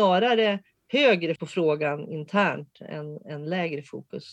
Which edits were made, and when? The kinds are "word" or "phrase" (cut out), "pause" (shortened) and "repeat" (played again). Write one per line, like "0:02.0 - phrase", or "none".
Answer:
0:01.4 - word